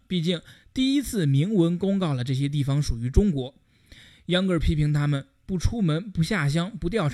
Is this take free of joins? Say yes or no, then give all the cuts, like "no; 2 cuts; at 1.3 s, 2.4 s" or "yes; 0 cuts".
yes; 0 cuts